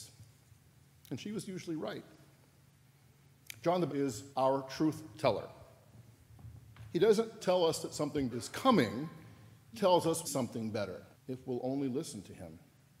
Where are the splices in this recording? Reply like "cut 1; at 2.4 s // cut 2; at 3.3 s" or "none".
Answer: cut 1; at 3.9 s // cut 2; at 4.3 s // cut 3; at 7.4 s // cut 4; at 8.3 s // cut 5; at 9.7 s // cut 6; at 10.2 s // cut 7; at 11.1 s